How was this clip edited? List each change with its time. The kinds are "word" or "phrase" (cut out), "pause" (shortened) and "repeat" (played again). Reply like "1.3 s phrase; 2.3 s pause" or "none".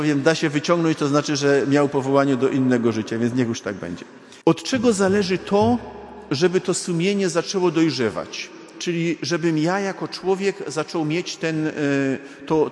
4.4 s pause

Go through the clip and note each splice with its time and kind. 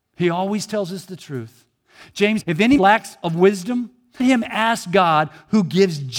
2.4 s word; 2.8 s word; 4.2 s word

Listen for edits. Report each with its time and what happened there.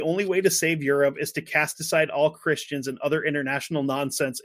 none

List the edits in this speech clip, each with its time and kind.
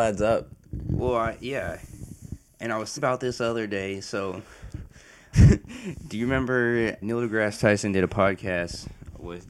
3.0 s word; 5.3 s word; 7.0 s word

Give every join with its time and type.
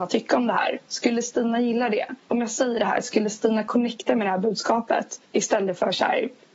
2.2 s pause; 5.2 s pause

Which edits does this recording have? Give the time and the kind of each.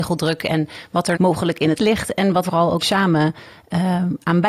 1.1 s word; 1.8 s word; 2.4 s word; 2.8 s word

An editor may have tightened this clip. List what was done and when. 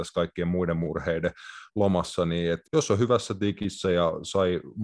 2.6 s word

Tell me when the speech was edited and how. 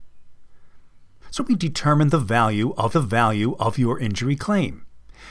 1.4 s word; 2.9 s repeat

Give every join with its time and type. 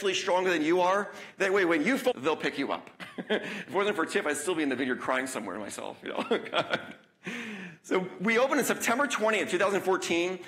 2.1 s phrase

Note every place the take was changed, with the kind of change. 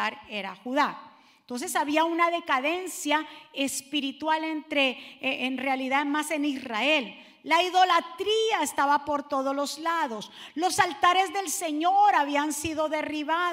none

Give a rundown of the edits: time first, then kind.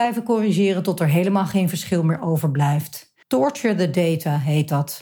3.2 s pause

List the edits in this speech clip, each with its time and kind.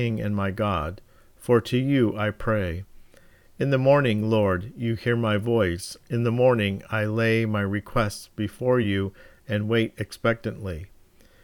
none

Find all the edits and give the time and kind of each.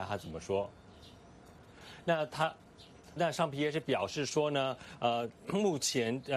3.2 s word

